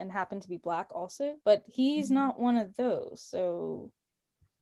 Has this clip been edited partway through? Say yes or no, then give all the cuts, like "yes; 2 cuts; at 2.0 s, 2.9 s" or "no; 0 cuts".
yes; 1 cut; at 1.4 s